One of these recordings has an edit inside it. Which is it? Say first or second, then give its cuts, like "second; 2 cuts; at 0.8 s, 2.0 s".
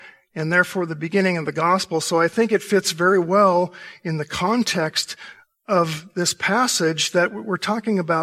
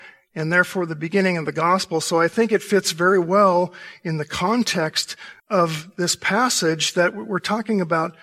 second; 1 cut; at 5.4 s